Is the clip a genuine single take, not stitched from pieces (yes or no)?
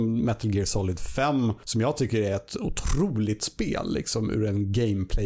yes